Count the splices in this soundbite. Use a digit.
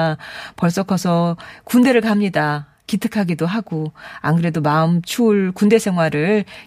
0